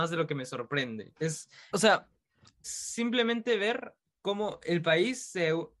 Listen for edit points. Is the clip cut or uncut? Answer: cut